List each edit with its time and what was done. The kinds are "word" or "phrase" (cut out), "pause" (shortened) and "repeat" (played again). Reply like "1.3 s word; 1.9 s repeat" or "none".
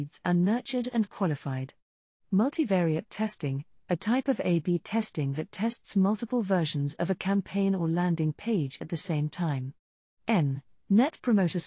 none